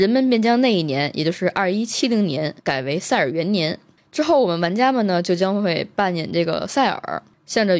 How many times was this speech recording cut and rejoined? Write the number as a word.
one